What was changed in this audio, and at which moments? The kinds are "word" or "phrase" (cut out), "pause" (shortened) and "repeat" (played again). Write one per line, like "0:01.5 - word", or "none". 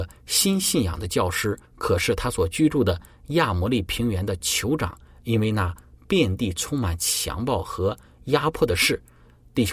0:01.7 - pause